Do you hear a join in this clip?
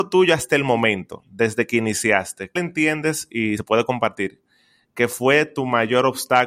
yes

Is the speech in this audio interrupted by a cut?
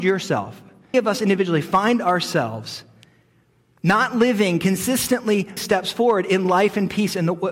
yes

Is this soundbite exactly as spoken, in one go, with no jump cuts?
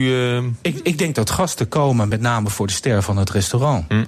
yes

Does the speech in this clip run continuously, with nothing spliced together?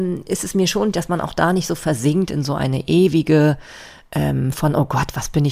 no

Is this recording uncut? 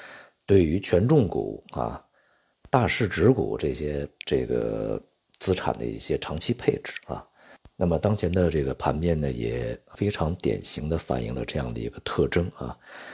no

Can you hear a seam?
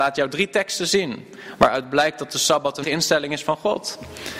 yes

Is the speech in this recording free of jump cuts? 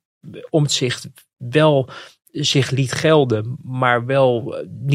yes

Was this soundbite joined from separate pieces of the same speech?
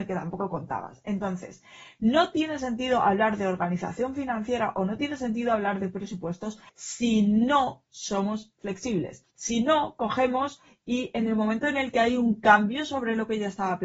yes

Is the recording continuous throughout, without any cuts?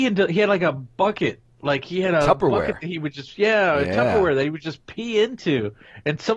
yes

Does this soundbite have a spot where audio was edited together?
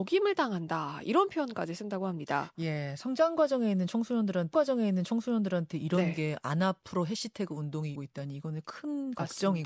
yes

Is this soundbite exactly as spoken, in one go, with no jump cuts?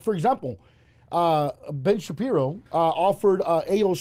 no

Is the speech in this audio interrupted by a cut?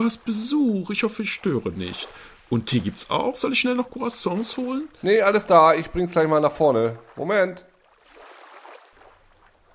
no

